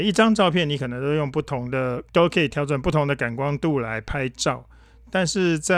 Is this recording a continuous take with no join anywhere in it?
no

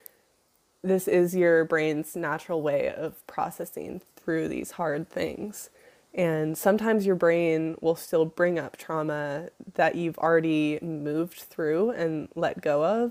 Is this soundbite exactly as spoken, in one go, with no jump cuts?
yes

